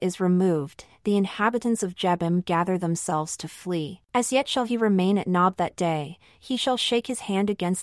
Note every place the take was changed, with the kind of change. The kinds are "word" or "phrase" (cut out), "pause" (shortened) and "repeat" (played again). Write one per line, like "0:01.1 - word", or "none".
0:04.0 - pause